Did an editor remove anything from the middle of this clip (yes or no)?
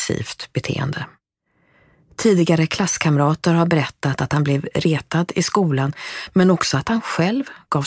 no